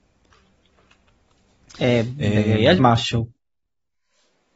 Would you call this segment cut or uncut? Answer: cut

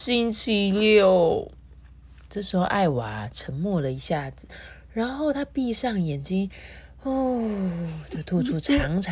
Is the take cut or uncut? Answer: uncut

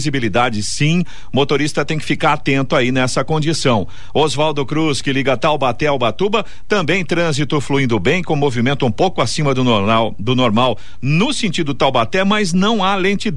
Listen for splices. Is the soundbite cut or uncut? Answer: uncut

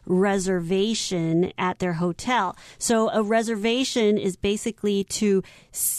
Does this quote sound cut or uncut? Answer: uncut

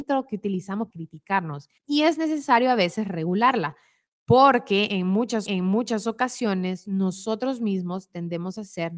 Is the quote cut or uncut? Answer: cut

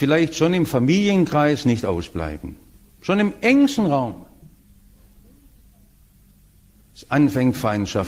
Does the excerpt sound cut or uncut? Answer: uncut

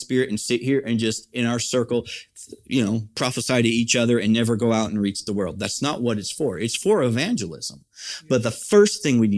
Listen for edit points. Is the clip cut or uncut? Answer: uncut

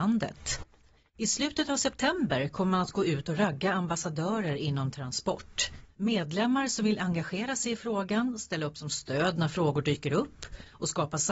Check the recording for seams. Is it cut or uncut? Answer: uncut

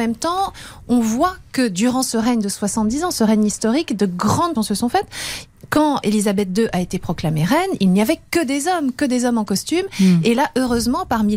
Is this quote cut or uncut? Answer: cut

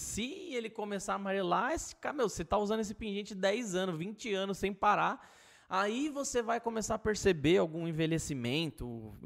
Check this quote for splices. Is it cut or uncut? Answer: uncut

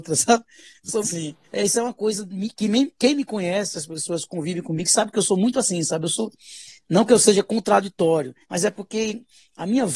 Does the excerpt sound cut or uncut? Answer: cut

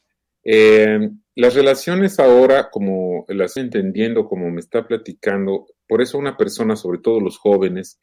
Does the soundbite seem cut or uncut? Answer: cut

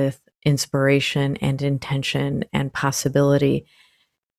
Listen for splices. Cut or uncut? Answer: uncut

